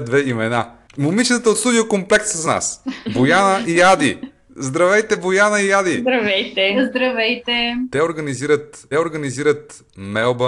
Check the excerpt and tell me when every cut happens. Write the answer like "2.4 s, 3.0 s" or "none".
2.4 s, 8.9 s